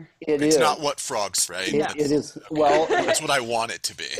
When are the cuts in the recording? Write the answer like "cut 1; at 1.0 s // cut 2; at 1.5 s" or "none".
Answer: cut 1; at 1.5 s

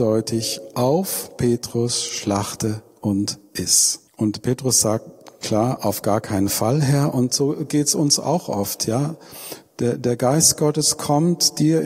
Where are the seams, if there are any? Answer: cut 1; at 4.1 s

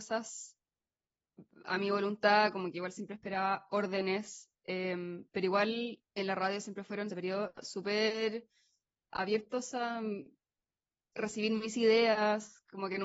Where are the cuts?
cut 1; at 6.1 s // cut 2; at 7.1 s

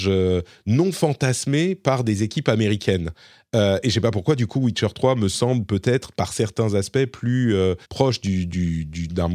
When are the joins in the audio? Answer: cut 1; at 7.8 s

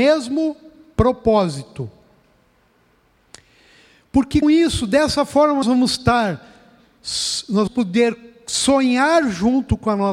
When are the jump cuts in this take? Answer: cut 1; at 4.4 s // cut 2; at 5.6 s // cut 3; at 7.7 s

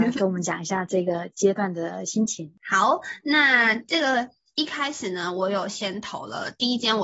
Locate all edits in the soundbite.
none

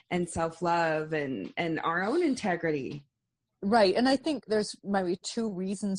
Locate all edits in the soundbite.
none

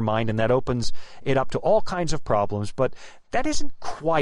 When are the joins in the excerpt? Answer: none

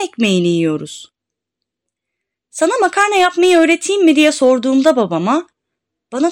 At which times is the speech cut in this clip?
none

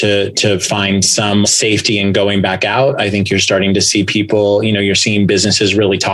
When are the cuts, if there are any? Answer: cut 1; at 1.4 s

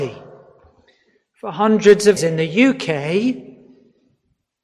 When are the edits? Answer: cut 1; at 2.2 s

